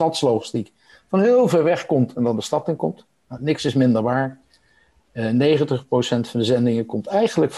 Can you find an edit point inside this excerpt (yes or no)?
no